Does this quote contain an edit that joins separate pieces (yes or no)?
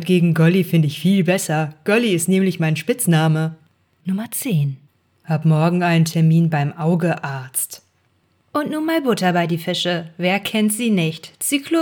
no